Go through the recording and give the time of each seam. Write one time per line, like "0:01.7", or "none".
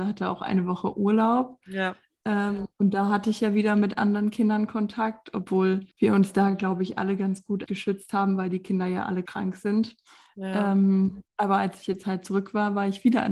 0:05.9
0:07.7
0:09.3
0:11.3